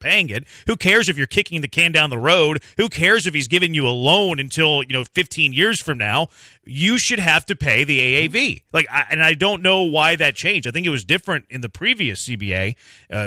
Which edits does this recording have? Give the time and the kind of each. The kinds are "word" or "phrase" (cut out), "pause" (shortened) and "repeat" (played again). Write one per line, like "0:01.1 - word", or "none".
none

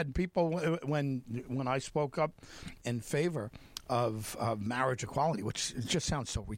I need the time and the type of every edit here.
0:02.8 - word

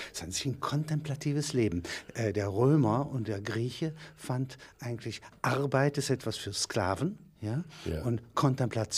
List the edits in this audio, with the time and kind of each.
none

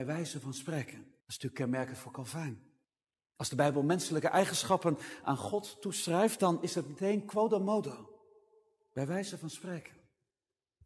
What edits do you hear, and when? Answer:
0:01.2 - pause
0:02.8 - pause

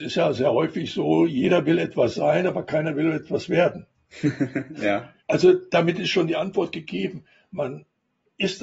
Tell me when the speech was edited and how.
0:05.2 - pause

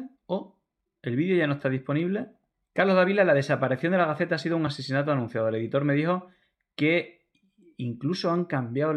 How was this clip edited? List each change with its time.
none

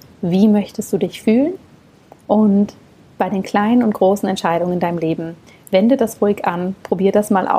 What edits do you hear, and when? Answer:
none

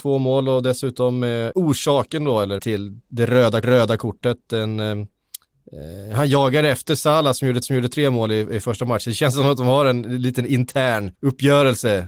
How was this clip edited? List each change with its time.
0:01.5 - word
0:02.6 - word
0:03.6 - repeat
0:07.6 - repeat
0:11.1 - pause

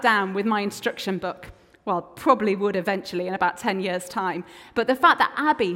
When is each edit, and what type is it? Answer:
none

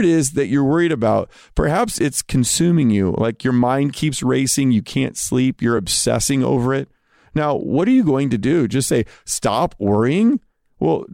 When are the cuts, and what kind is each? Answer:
none

